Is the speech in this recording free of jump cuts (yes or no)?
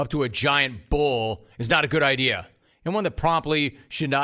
yes